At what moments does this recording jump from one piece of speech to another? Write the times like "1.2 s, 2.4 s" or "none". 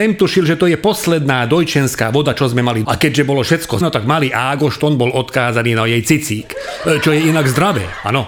2.8 s, 3.8 s